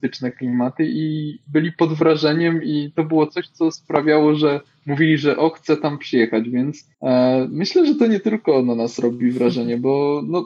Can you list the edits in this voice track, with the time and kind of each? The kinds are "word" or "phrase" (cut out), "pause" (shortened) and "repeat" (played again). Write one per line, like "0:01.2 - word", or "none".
0:06.9 - pause